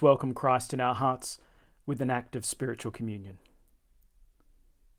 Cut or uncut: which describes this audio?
uncut